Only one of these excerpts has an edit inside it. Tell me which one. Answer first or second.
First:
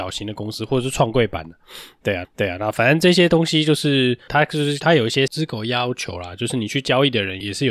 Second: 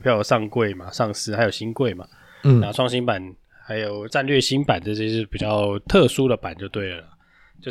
first